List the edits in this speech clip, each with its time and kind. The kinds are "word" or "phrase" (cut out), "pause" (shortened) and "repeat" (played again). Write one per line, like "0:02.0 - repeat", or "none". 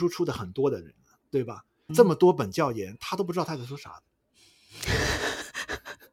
0:01.9 - phrase